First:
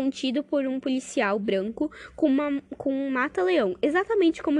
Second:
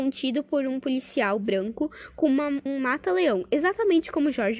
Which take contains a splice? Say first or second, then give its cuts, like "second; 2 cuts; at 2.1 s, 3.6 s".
second; 1 cut; at 2.7 s